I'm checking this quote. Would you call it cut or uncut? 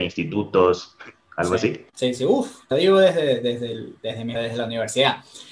cut